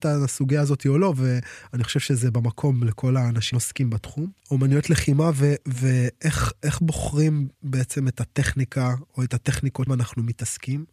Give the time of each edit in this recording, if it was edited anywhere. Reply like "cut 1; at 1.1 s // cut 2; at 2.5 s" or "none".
cut 1; at 3.5 s // cut 2; at 4.4 s // cut 3; at 7.5 s // cut 4; at 9.9 s